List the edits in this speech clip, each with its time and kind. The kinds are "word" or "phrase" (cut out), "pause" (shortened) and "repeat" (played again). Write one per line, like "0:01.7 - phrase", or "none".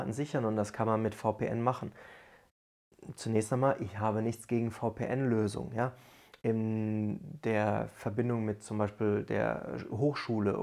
none